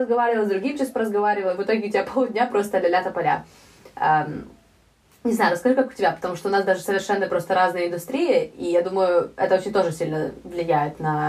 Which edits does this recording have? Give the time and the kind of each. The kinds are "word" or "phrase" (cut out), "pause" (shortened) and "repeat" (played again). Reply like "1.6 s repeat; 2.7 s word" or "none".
none